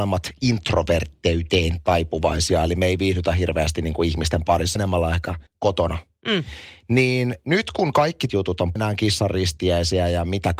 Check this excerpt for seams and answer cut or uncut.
cut